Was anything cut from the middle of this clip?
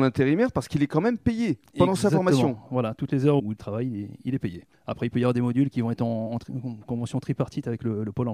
yes; 1 cut; at 3.4 s

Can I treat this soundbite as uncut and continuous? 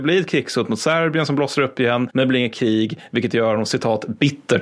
yes; 0 cuts

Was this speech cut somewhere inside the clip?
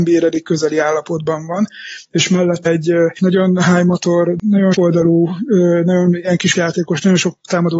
yes; 3 cuts; at 2.7 s, 4.7 s, 6.6 s

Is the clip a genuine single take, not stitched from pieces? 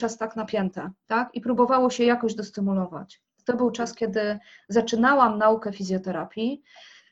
yes; 0 cuts

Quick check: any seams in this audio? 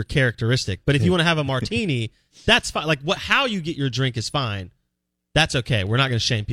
no; 0 cuts

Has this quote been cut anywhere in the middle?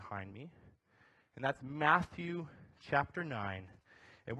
no; 0 cuts

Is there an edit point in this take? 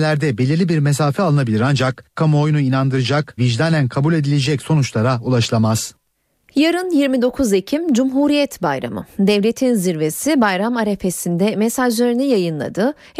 yes; 2 cuts; at 2.2 s, 3.4 s

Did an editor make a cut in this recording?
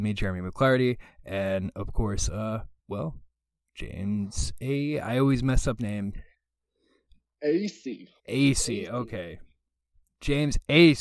yes; 3 cuts; at 2.8 s, 5.8 s, 8.2 s

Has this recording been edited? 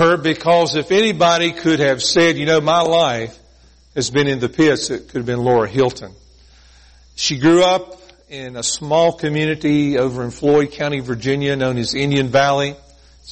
no; 0 cuts

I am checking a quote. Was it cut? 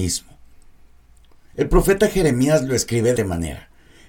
yes; 1 cut; at 3.2 s

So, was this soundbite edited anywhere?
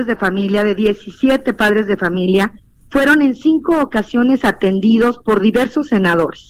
no; 0 cuts

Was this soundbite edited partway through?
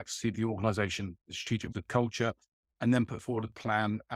yes; 1 cut; at 1.7 s

